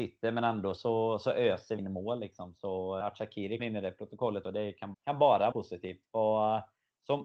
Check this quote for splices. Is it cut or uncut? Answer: cut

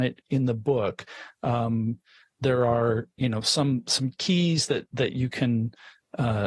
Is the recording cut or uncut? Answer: uncut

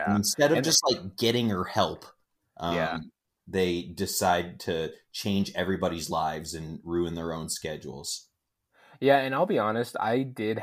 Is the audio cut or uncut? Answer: uncut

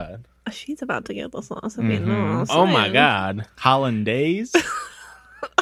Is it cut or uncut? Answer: uncut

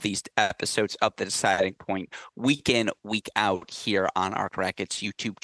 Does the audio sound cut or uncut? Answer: cut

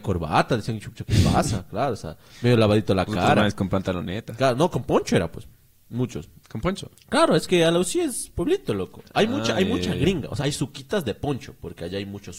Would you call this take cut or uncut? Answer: cut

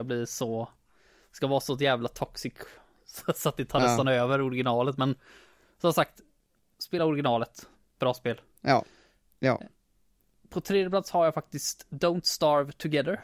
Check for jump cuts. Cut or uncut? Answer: uncut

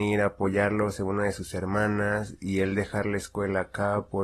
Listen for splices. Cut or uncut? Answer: uncut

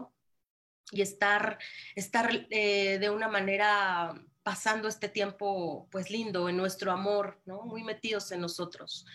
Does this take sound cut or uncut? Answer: uncut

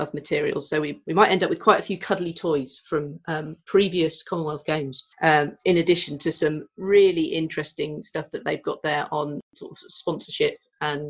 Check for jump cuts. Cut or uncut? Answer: cut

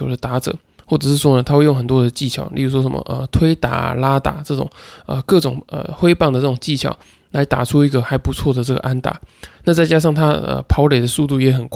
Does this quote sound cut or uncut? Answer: uncut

